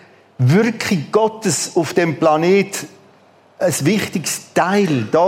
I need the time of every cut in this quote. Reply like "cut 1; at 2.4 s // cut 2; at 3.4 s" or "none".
none